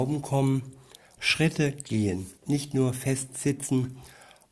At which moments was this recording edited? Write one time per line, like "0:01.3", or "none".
0:01.2
0:02.4